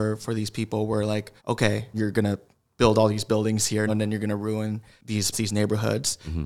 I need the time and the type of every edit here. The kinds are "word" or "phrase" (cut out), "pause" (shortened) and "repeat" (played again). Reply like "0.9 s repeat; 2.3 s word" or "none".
1.4 s pause; 3.9 s word; 5.3 s word